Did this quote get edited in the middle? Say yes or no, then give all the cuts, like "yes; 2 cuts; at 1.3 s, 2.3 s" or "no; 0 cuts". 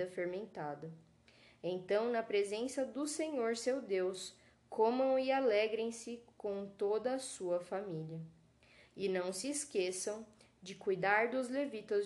no; 0 cuts